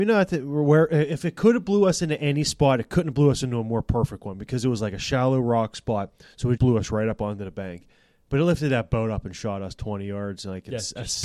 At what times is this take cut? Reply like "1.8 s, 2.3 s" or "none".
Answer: 6.6 s